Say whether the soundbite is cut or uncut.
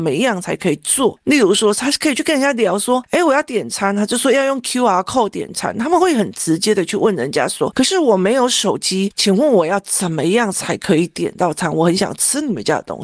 uncut